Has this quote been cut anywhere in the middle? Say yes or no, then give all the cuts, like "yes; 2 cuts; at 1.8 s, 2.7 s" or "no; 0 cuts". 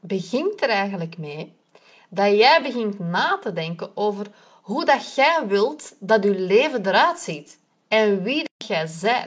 no; 0 cuts